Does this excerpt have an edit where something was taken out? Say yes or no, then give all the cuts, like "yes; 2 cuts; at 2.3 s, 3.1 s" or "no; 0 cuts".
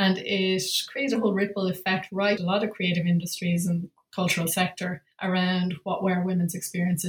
yes; 2 cuts; at 2.4 s, 5.1 s